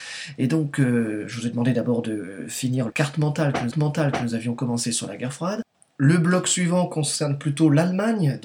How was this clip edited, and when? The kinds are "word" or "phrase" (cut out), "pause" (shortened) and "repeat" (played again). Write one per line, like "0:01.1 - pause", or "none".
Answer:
0:02.9 - word
0:03.7 - repeat
0:05.7 - pause